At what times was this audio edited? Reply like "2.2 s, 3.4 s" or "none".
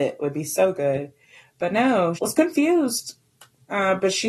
2.2 s

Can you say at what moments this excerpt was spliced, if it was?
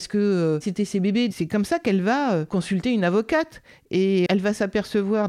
4.3 s

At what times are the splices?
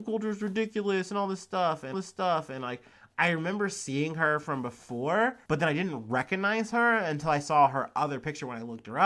1.9 s, 5.4 s

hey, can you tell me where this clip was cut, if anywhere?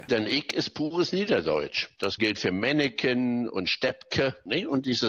2.2 s

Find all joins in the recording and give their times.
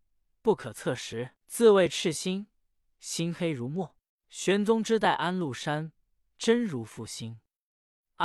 1.4 s, 4.1 s

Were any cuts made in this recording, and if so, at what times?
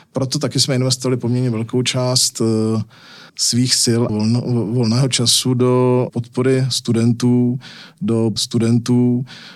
3.3 s, 4.1 s, 6.1 s, 8.4 s

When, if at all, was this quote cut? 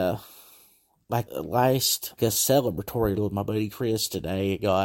1.3 s, 2.2 s, 3.2 s

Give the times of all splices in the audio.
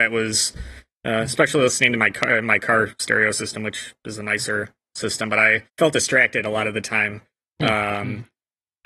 5.7 s

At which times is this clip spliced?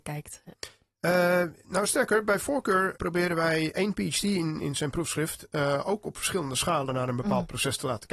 3.0 s, 3.7 s, 4.6 s

